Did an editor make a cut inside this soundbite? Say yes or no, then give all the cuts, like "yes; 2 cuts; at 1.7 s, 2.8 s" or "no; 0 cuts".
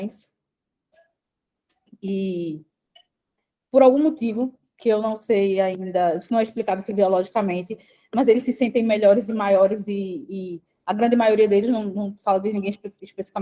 no; 0 cuts